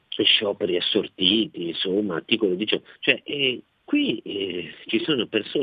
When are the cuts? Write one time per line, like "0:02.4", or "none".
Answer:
0:03.0